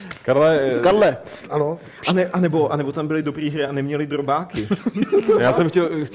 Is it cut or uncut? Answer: uncut